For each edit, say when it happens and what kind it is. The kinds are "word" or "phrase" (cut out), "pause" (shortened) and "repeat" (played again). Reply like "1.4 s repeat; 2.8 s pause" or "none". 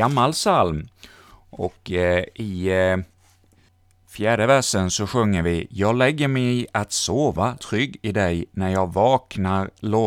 7.6 s phrase